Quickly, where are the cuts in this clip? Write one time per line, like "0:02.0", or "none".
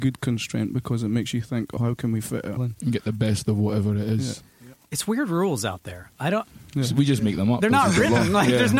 0:01.8
0:02.6